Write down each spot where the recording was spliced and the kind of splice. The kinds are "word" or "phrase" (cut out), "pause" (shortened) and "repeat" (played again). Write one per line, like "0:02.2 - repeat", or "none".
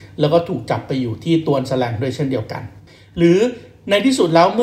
none